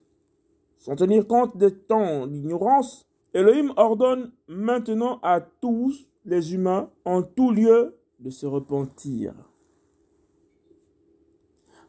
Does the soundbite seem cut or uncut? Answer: cut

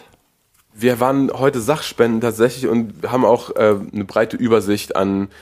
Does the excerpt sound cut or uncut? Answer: uncut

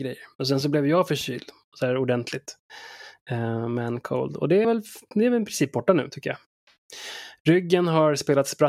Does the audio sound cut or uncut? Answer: cut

